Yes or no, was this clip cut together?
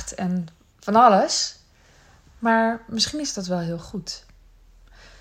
no